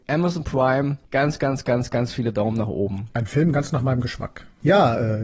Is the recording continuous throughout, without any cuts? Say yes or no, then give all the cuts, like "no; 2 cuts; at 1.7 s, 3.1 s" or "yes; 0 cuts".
yes; 0 cuts